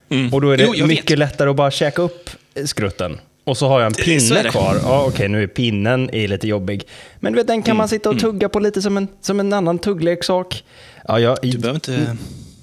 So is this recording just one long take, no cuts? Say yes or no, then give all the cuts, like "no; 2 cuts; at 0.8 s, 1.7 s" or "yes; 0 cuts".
yes; 0 cuts